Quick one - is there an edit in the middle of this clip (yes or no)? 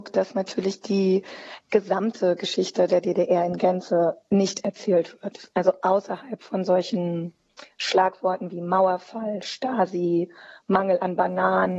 no